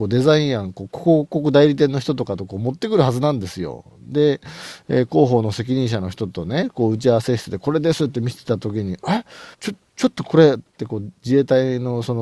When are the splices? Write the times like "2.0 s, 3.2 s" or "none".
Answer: 9.5 s